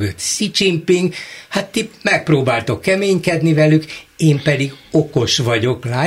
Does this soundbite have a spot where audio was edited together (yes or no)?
no